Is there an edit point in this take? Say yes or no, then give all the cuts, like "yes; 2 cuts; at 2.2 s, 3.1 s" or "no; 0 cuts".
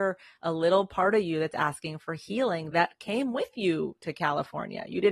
no; 0 cuts